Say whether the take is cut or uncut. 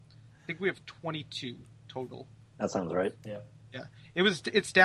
uncut